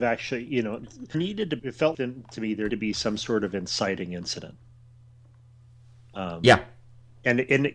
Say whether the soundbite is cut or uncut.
cut